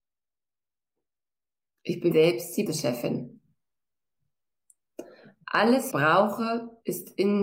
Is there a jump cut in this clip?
yes; 3 cuts; at 2.1 s, 2.7 s, 5.9 s

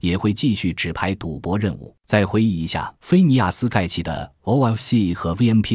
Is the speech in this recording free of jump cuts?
no; 2 cuts; at 2.0 s, 3.0 s

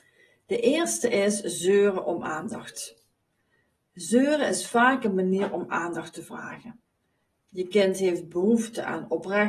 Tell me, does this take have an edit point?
no; 0 cuts

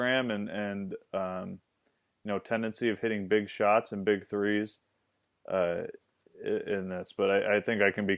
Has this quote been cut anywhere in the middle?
no; 0 cuts

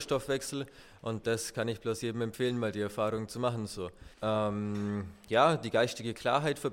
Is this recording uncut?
no; 1 cut; at 4.1 s

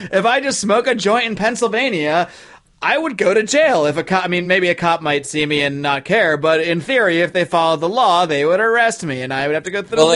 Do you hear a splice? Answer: no; 0 cuts

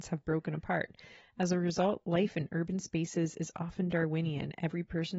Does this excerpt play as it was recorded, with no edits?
yes; 0 cuts

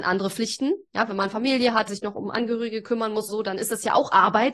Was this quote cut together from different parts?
yes; 2 cuts; at 1.9 s, 3.3 s

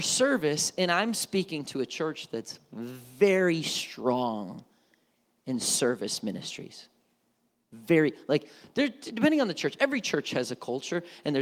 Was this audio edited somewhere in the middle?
no; 0 cuts

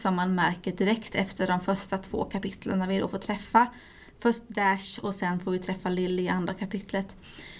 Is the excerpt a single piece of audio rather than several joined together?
yes; 0 cuts

